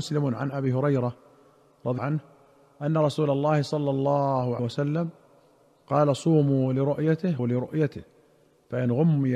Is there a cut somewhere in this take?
yes; 3 cuts; at 2.0 s, 4.6 s, 7.4 s

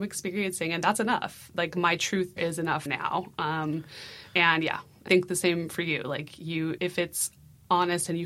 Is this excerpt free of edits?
no; 4 cuts; at 2.4 s, 2.9 s, 5.1 s, 6.8 s

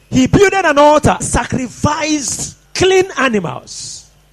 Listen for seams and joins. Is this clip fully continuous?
no; 2 cuts; at 1.2 s, 2.7 s

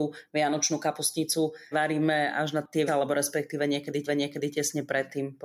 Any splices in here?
yes; 3 cuts; at 1.7 s, 2.9 s, 4.1 s

